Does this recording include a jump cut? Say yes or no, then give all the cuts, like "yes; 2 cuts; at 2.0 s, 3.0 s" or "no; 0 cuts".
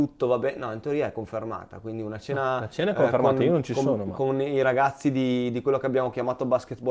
no; 0 cuts